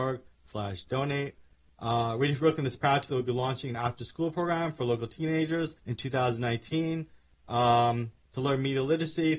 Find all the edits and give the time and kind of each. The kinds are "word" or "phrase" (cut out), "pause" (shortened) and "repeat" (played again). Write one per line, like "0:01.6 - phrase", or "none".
0:03.0 - phrase
0:05.8 - pause
0:08.2 - pause